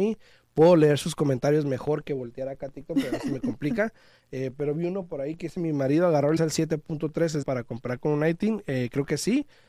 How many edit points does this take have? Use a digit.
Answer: 2